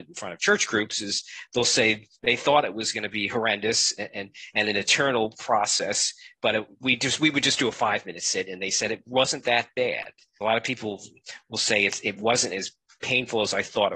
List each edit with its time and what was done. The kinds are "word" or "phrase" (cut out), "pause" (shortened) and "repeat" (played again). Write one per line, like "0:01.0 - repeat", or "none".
0:06.7 - pause